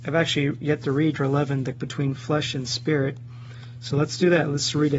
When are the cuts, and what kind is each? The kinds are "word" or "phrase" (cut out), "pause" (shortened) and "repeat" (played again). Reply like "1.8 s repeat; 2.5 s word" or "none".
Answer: 1.2 s word; 1.7 s word